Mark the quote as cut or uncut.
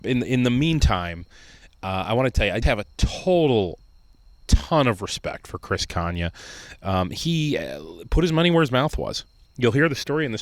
cut